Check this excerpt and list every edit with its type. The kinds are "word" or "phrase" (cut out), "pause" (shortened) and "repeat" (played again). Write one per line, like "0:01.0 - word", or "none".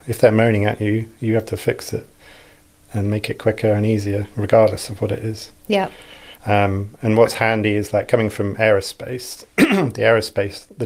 none